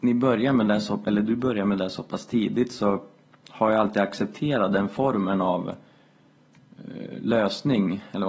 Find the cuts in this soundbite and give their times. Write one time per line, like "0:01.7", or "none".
none